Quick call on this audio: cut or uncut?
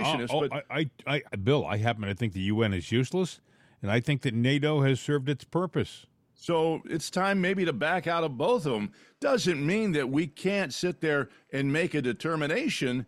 cut